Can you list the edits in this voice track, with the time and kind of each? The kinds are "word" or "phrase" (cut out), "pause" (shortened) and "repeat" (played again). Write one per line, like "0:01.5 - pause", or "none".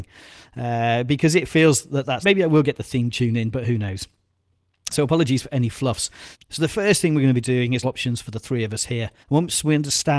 0:02.2 - word
0:04.9 - word
0:07.8 - phrase
0:09.2 - pause

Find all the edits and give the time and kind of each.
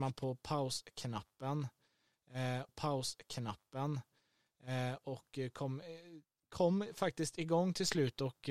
0:02.7 - repeat

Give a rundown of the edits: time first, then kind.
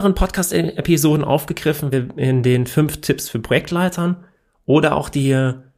0:01.9 - word

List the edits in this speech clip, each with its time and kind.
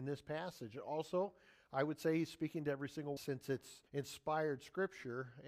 0:03.2 - phrase
0:03.9 - pause

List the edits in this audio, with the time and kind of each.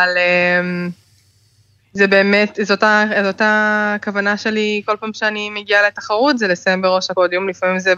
none

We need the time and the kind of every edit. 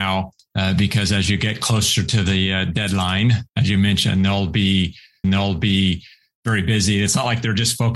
0:03.5 - pause
0:05.2 - repeat

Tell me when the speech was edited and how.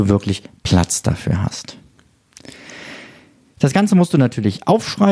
none

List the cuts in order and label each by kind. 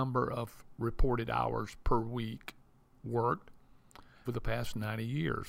0:04.2 - phrase

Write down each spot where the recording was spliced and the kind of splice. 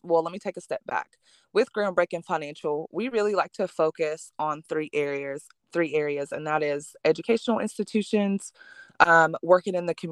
none

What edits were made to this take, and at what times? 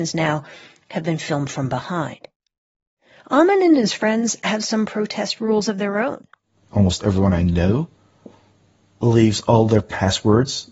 none

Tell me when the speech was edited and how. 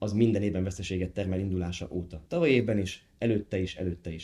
0:02.3 - pause

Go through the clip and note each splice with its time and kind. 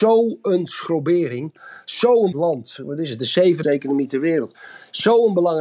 0:02.3 - word
0:03.6 - phrase

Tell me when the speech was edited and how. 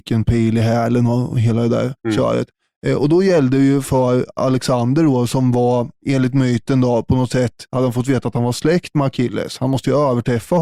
0:02.0 - pause
0:07.7 - pause

